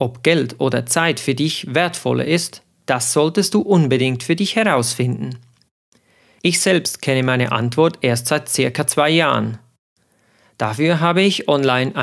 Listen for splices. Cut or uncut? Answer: uncut